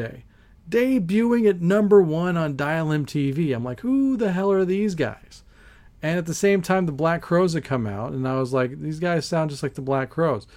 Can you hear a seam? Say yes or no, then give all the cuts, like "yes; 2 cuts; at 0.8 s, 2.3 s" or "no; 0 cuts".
no; 0 cuts